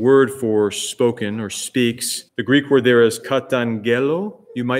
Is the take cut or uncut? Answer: cut